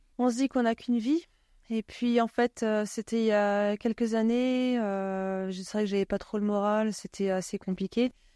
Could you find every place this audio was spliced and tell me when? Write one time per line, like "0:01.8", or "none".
none